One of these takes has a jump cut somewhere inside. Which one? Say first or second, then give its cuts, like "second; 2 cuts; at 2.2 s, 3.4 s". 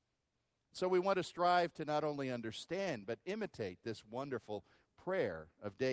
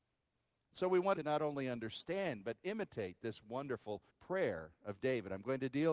second; 2 cuts; at 1.2 s, 4.1 s